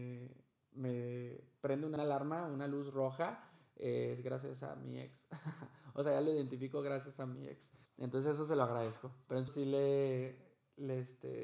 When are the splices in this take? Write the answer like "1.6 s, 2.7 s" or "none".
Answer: 2.0 s, 7.9 s, 9.5 s